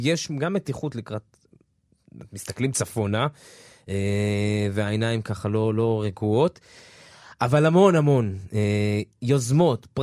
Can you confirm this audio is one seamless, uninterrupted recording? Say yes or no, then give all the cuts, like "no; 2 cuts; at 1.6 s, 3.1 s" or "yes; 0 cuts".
yes; 0 cuts